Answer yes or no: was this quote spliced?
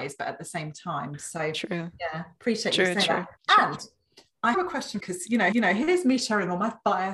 yes